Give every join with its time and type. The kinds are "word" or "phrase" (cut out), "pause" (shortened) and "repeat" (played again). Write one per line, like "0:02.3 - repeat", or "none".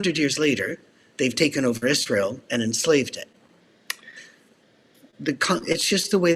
none